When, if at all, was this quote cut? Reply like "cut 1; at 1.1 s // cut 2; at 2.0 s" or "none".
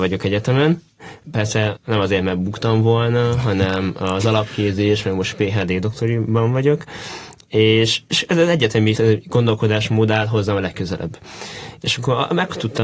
cut 1; at 9.0 s